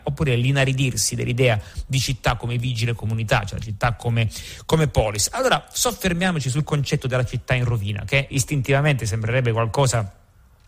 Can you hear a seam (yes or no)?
yes